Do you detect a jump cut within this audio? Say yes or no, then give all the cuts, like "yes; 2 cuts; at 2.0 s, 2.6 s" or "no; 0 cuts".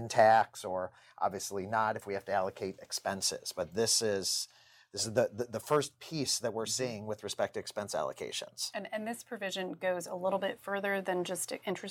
no; 0 cuts